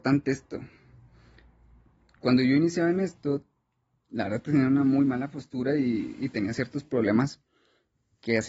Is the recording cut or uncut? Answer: uncut